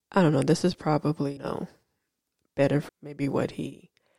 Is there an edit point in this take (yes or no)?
yes